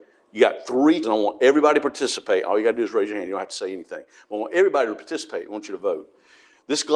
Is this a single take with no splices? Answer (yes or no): no